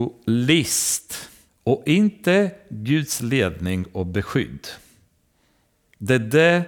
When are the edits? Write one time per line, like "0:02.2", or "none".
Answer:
0:01.5